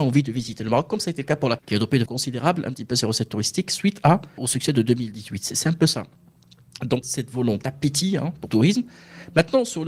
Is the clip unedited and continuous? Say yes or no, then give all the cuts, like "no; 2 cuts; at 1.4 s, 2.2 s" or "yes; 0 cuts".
no; 6 cuts; at 1.6 s, 2.1 s, 4.4 s, 7.0 s, 7.6 s, 8.5 s